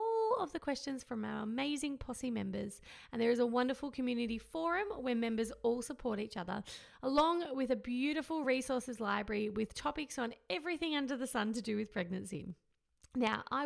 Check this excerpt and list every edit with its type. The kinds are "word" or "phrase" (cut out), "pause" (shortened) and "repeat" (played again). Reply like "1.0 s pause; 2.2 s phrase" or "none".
none

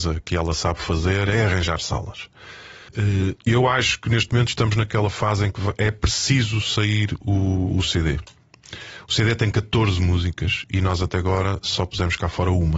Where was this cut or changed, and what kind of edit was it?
2.9 s pause

